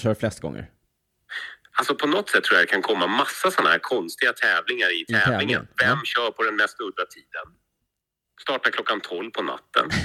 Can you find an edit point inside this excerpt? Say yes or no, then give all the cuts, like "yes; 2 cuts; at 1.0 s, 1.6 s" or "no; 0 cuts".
no; 0 cuts